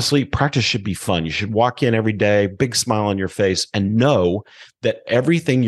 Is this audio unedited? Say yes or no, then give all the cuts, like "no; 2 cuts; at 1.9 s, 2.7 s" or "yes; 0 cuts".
yes; 0 cuts